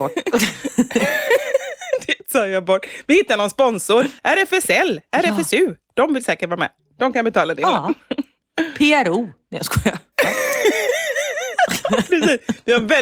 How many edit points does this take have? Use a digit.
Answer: 1